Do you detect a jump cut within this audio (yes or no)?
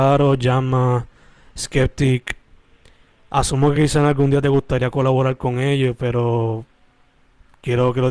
no